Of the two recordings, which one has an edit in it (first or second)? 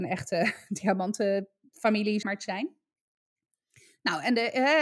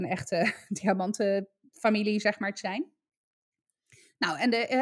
first